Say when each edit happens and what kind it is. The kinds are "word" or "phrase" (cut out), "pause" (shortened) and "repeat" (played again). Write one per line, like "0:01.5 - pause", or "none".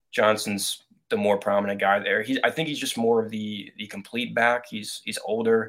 none